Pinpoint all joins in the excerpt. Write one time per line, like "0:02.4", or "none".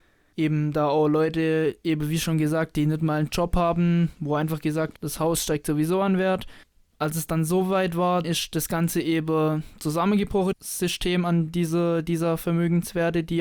0:05.0
0:06.6
0:08.2
0:10.5